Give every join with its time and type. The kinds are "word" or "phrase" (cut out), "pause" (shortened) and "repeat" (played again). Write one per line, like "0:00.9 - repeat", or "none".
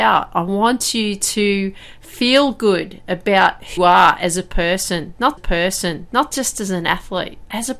0:03.8 - word
0:05.4 - repeat